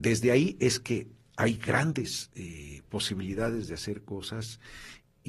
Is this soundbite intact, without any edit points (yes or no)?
yes